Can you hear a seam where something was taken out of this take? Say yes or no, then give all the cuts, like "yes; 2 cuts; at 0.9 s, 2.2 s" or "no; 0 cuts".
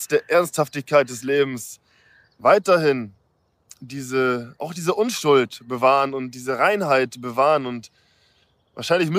no; 0 cuts